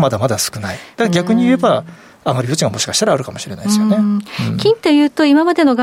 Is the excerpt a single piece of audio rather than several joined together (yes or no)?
yes